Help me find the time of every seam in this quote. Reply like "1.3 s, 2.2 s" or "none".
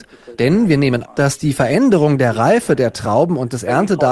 1.0 s